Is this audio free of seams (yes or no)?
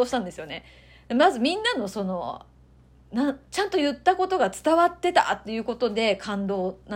yes